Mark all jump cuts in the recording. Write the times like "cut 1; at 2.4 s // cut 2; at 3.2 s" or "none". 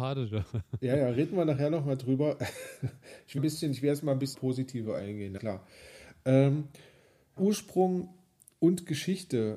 cut 1; at 3.4 s // cut 2; at 4.3 s // cut 3; at 5.4 s // cut 4; at 7.4 s